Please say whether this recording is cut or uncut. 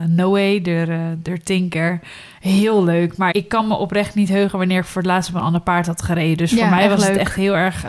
cut